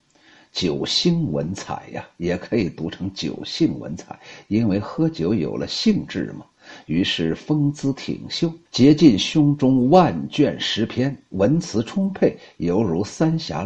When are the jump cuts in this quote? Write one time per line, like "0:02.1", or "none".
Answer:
0:08.7